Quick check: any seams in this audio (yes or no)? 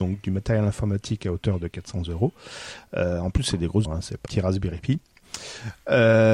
yes